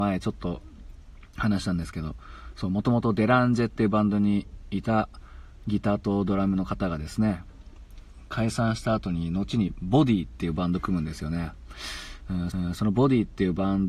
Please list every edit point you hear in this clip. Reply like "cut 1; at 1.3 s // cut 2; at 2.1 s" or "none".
cut 1; at 12.5 s